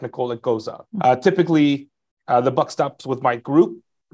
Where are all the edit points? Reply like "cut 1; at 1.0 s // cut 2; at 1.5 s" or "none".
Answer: cut 1; at 0.9 s